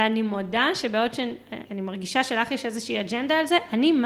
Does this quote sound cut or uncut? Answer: cut